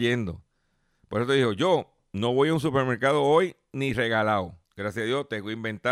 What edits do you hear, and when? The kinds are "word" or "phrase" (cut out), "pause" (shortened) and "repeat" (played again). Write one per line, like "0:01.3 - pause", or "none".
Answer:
0:04.6 - pause

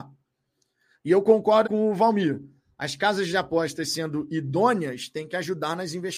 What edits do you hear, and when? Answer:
0:01.6 - word

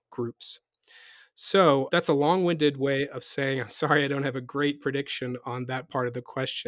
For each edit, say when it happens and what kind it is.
0:01.9 - word

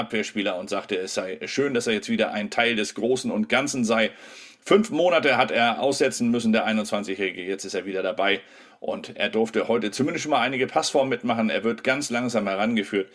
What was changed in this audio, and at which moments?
none

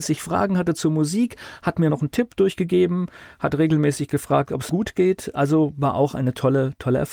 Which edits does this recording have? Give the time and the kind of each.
0:01.9 - word
0:04.7 - word

